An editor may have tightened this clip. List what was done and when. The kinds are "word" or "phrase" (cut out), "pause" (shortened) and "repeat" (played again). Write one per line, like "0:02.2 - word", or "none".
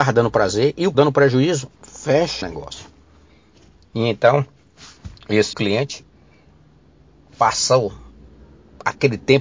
0:00.9 - word
0:02.4 - word
0:05.5 - word